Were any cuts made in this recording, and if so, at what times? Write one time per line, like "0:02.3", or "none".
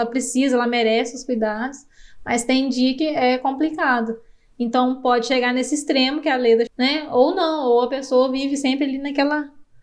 0:03.0
0:06.7